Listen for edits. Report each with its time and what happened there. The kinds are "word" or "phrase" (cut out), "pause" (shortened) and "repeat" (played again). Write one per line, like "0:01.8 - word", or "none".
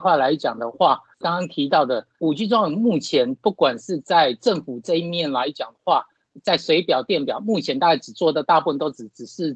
0:01.2 - word